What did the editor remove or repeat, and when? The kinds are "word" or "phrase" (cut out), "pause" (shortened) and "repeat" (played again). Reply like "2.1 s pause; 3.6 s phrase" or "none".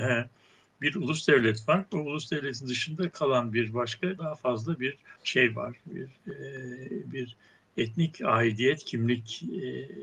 4.2 s phrase; 5.2 s pause

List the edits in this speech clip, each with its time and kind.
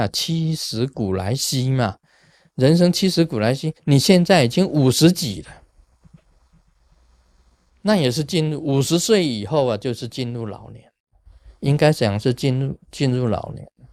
3.8 s pause

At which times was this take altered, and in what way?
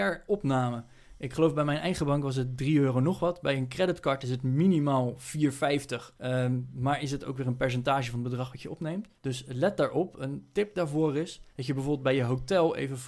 6.1 s pause; 9.2 s pause; 11.5 s pause

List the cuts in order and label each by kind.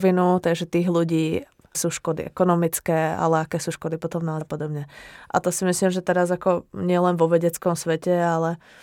1.7 s word; 4.4 s word

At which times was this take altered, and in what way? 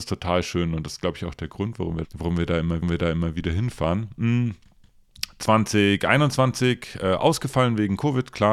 2.0 s word; 2.8 s repeat

